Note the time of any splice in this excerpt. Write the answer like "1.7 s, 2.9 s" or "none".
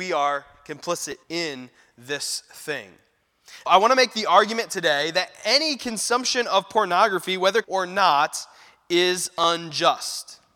1.2 s, 3.7 s, 7.6 s

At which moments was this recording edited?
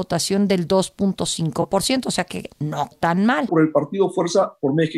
2.9 s, 3.5 s

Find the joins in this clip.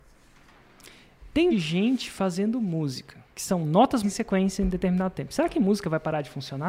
1.5 s, 3.3 s, 4.0 s

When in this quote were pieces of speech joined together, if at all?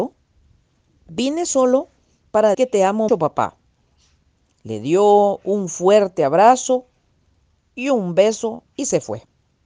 2.5 s, 3.1 s

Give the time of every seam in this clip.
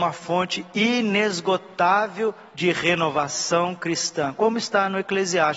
2.5 s

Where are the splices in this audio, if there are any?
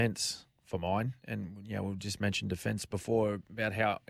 none

